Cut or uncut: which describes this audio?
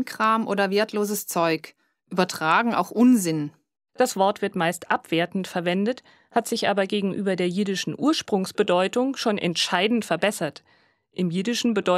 uncut